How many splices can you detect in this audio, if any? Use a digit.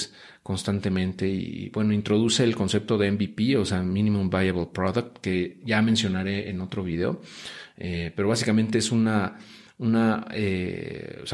0